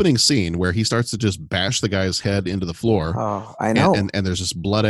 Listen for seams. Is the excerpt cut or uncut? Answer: uncut